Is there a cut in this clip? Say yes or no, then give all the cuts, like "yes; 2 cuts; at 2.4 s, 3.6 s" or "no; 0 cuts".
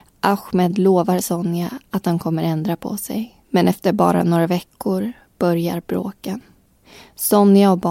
yes; 1 cut; at 3.4 s